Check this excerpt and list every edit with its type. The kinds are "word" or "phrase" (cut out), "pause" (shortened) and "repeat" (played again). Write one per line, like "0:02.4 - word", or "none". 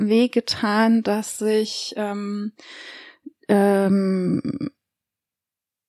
none